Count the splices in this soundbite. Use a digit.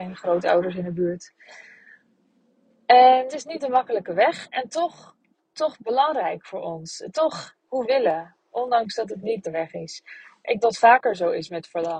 6